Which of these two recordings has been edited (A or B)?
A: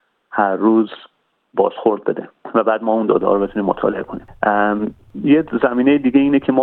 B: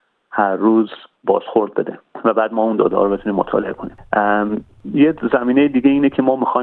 B